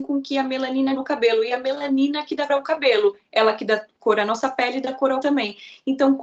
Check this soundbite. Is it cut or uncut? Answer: cut